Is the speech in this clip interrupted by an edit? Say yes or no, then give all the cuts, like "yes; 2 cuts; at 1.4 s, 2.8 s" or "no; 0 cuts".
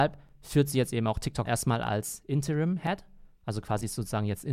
yes; 1 cut; at 1.4 s